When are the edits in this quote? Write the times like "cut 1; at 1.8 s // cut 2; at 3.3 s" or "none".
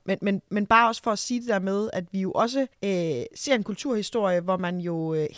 cut 1; at 2.7 s